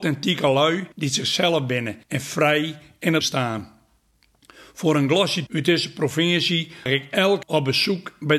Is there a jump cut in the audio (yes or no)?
yes